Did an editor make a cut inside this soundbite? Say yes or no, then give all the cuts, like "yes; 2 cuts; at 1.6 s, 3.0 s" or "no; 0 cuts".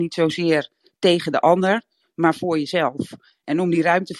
no; 0 cuts